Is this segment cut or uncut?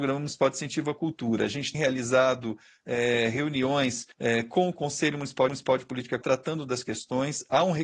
cut